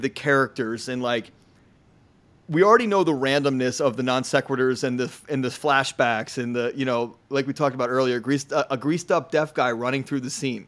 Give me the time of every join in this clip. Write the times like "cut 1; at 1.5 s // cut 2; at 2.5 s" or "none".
none